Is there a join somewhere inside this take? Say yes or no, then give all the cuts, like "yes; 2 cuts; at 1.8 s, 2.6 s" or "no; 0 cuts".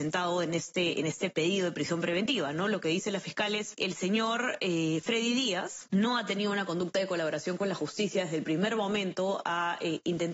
no; 0 cuts